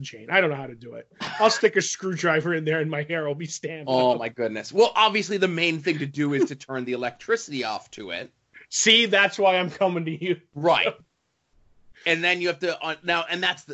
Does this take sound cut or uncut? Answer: uncut